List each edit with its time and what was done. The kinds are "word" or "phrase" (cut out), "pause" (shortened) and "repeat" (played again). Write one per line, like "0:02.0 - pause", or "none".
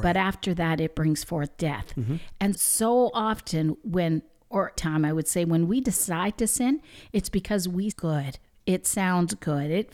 0:02.5 - word
0:04.8 - word
0:07.9 - phrase